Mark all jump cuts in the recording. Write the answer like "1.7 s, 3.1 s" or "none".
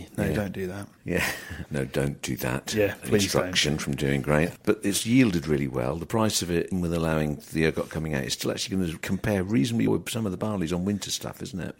6.7 s, 9.9 s